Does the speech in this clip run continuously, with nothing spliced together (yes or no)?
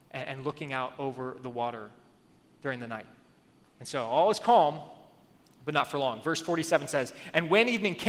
yes